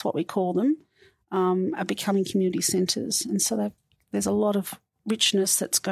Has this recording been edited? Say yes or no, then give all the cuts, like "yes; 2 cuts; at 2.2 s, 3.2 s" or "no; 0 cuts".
no; 0 cuts